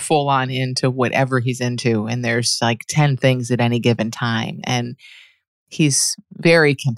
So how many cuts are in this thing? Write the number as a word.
zero